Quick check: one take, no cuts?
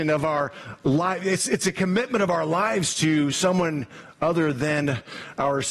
yes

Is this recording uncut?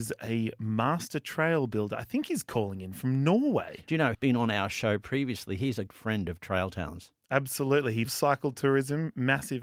no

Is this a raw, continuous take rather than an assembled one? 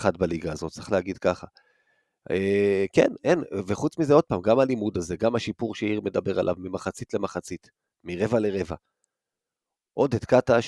yes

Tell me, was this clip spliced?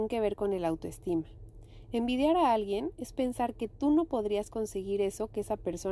no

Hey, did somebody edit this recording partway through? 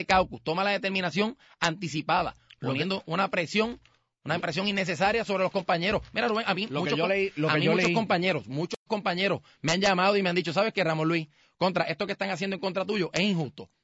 no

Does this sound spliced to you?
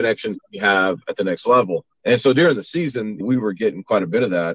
yes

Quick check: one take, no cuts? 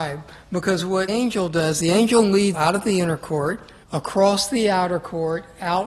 no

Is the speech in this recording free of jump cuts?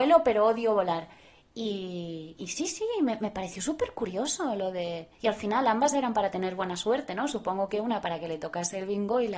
no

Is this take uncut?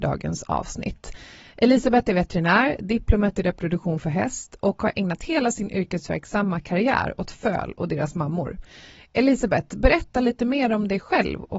yes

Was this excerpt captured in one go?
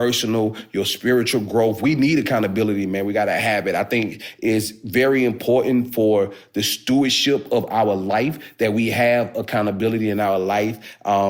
yes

